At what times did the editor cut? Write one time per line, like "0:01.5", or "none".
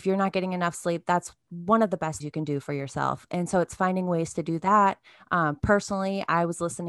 0:02.2